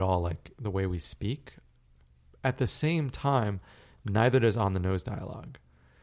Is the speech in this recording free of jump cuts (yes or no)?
yes